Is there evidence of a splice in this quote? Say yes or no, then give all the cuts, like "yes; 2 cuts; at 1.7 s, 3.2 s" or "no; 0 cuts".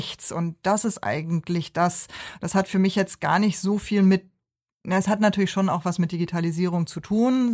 no; 0 cuts